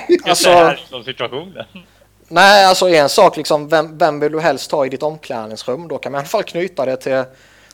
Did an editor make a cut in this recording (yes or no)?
no